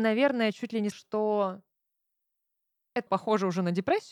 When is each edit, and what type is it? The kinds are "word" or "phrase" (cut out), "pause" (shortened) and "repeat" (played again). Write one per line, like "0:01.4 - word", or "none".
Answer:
0:00.9 - word
0:03.1 - word